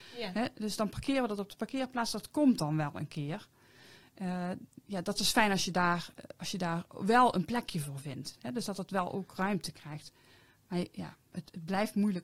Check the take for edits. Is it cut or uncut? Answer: uncut